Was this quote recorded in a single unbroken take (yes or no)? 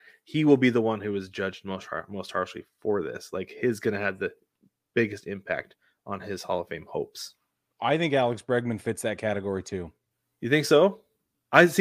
yes